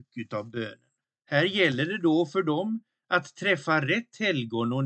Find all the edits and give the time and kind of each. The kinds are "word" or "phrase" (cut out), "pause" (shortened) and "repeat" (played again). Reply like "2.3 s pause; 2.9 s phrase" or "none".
1.0 s pause